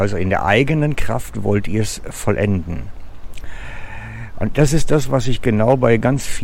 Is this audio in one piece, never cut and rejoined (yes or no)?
yes